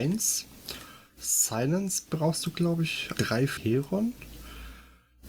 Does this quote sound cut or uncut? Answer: cut